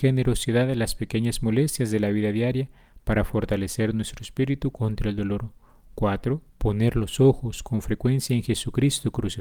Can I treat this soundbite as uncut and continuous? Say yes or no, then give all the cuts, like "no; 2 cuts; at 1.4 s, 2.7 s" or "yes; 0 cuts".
no; 1 cut; at 6.5 s